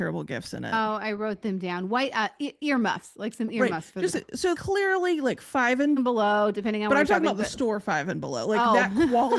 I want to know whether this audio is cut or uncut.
cut